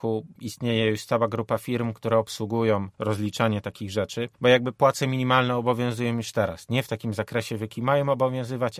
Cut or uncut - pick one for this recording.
cut